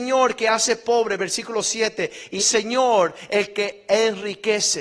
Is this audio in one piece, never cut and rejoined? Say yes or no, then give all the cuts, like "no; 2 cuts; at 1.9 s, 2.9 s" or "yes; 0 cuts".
no; 1 cut; at 2.4 s